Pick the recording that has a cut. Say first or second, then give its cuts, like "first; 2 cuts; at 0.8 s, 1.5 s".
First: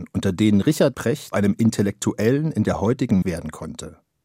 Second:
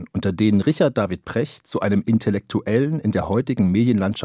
first; 3 cuts; at 0.9 s, 1.3 s, 3.2 s